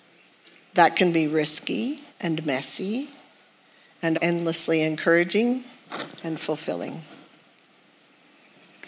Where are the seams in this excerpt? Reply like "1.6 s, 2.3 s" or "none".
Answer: 2.1 s, 4.1 s